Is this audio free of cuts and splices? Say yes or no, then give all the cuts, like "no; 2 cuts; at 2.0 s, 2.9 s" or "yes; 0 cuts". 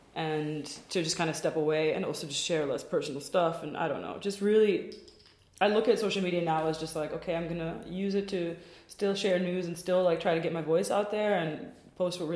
yes; 0 cuts